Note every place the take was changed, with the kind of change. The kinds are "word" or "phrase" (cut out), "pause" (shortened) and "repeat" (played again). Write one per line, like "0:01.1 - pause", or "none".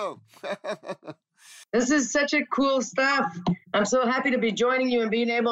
0:01.7 - pause
0:02.5 - word
0:03.6 - pause